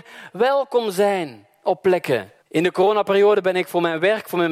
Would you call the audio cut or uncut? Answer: cut